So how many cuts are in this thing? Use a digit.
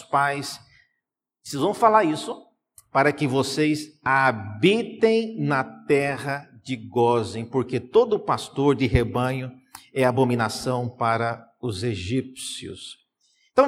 0